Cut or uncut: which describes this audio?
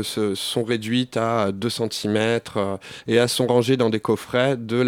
uncut